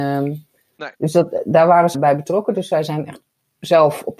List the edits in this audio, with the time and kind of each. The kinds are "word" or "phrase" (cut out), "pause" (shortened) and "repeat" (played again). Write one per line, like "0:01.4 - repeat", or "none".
0:00.9 - pause
0:01.9 - word